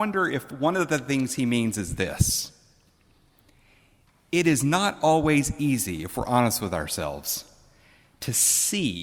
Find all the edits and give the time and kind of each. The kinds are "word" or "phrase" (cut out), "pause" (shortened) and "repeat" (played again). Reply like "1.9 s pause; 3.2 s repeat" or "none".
none